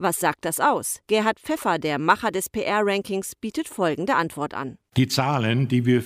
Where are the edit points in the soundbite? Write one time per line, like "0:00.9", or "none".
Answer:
0:01.0